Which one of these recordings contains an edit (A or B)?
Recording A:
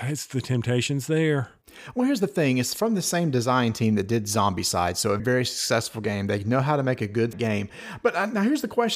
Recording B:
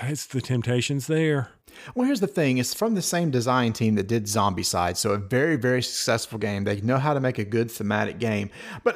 A